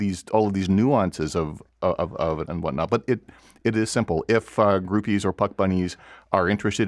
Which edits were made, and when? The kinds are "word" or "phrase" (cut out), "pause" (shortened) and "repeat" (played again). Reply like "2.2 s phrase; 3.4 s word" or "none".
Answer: 2.5 s word

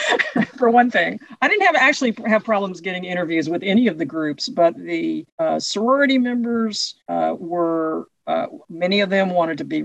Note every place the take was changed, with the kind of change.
5.3 s pause; 7.0 s pause

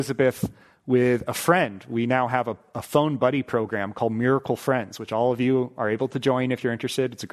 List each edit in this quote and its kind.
none

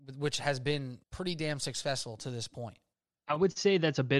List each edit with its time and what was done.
1.0 s pause; 2.9 s pause

